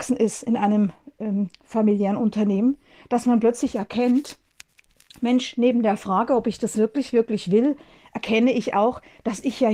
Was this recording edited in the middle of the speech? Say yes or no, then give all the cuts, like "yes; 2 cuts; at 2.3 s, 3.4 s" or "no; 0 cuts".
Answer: no; 0 cuts